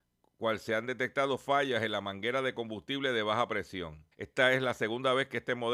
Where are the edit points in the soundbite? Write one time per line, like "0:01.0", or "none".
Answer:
0:04.1